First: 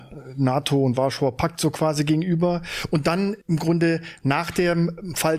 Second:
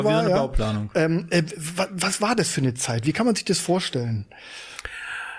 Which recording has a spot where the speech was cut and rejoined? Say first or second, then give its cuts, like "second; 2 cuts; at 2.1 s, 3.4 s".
first; 1 cut; at 3.4 s